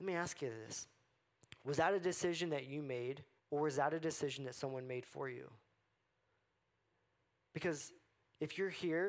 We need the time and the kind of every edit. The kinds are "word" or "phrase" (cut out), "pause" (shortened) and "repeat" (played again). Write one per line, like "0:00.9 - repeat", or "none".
0:03.4 - pause